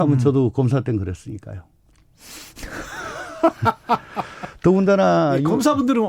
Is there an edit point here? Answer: no; 0 cuts

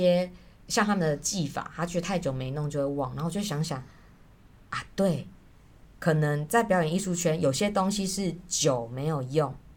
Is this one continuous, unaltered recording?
yes; 0 cuts

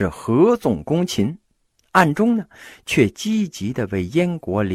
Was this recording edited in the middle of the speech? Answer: no; 0 cuts

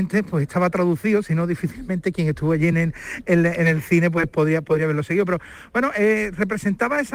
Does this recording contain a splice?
no; 0 cuts

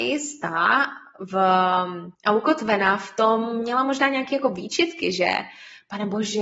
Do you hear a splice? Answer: yes; 1 cut; at 2.1 s

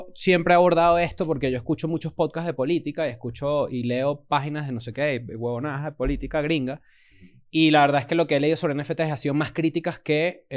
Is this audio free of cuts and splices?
yes; 0 cuts

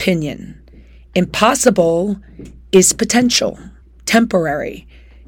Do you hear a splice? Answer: yes; 1 cut; at 3.8 s

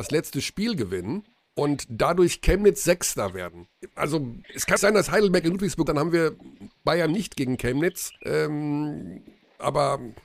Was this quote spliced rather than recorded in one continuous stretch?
yes; 5 cuts; at 1.4 s, 4.4 s, 4.8 s, 5.9 s, 8.2 s

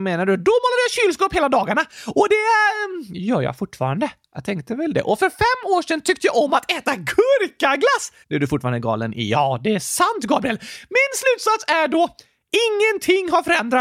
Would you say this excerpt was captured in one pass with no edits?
no; 1 cut; at 8.2 s

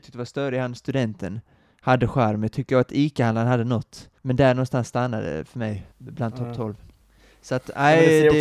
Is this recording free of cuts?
no; 2 cuts; at 4.2 s, 5.9 s

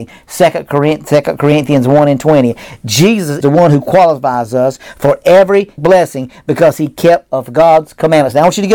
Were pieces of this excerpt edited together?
yes; 3 cuts; at 3.4 s, 5.8 s, 7.3 s

